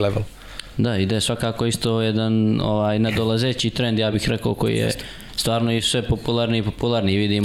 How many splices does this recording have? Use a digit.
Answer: 0